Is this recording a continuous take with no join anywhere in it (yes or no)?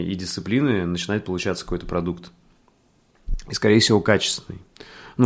yes